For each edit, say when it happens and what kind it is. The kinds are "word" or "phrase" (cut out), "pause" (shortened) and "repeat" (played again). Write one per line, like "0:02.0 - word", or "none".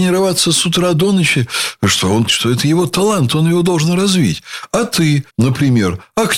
0:02.3 - word
0:05.3 - pause